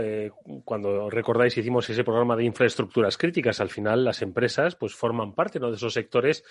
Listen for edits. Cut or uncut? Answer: uncut